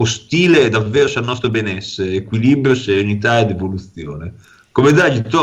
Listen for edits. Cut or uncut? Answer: uncut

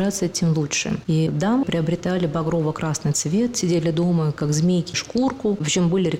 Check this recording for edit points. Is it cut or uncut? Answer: cut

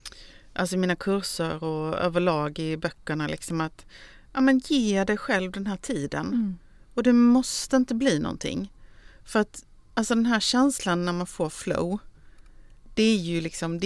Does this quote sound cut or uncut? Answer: uncut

